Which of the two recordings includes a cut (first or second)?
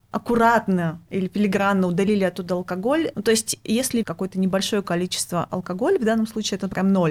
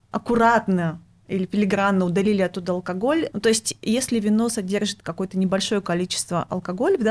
first